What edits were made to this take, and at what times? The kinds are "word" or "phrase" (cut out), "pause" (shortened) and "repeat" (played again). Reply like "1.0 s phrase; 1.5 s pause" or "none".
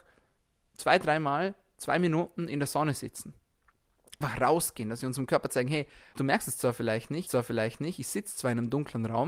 4.2 s word; 6.1 s word; 7.3 s repeat